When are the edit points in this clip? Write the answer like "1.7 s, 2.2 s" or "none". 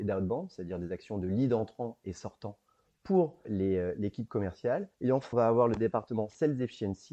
3.4 s, 4.9 s, 5.3 s